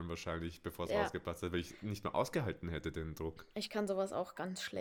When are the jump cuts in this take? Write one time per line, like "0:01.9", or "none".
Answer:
0:03.5